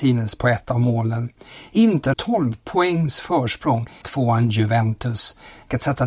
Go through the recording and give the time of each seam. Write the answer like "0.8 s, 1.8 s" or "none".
2.1 s, 4.0 s